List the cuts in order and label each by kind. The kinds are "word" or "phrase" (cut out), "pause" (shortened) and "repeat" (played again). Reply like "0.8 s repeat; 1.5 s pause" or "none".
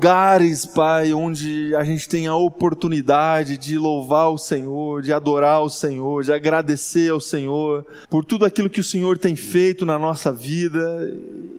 8.0 s pause